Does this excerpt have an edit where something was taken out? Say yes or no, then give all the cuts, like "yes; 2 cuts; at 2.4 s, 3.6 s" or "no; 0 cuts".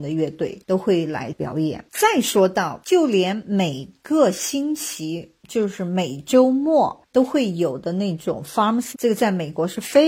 yes; 1 cut; at 8.9 s